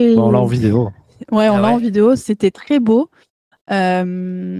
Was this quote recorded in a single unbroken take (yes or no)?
yes